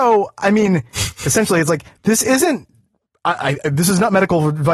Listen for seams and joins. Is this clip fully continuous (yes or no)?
yes